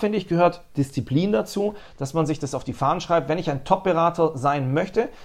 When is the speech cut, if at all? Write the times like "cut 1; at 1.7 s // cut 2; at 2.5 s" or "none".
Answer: none